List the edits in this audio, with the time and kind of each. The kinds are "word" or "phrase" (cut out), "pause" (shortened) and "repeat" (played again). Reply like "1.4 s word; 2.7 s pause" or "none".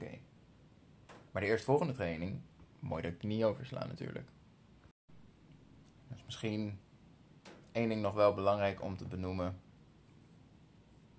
1.3 s pause